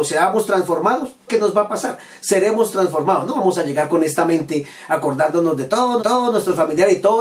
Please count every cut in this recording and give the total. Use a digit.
2